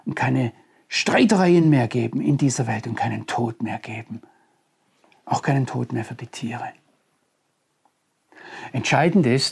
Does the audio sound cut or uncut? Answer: uncut